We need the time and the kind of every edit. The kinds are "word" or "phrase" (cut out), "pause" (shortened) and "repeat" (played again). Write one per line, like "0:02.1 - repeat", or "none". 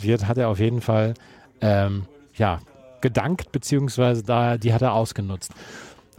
none